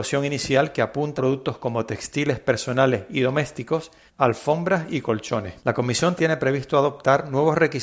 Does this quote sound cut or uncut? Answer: cut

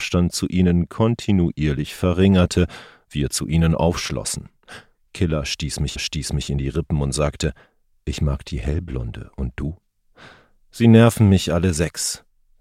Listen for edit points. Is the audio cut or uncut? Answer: cut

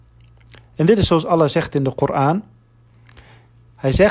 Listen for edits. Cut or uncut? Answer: uncut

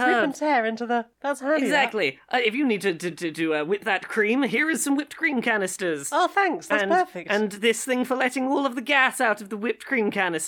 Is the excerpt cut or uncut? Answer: uncut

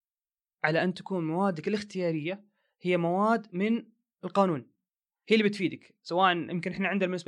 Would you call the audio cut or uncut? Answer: uncut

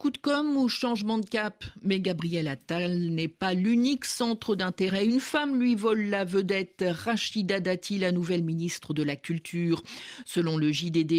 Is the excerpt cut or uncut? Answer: uncut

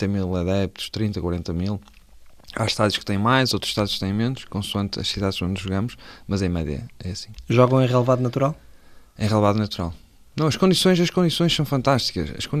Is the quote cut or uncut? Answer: uncut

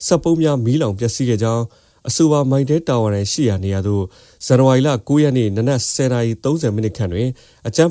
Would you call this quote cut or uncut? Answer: uncut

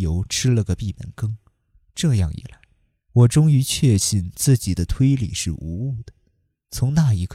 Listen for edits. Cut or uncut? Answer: uncut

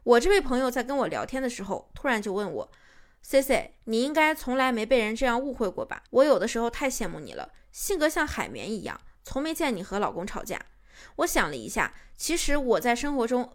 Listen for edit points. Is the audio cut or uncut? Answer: uncut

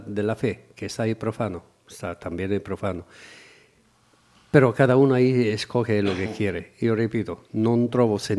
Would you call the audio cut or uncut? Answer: uncut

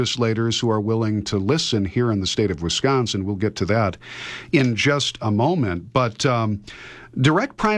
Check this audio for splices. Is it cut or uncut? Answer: uncut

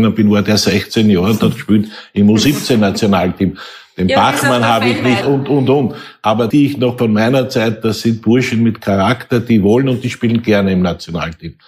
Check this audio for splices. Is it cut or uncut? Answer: cut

